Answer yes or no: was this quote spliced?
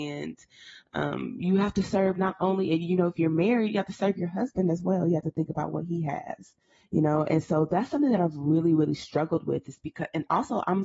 yes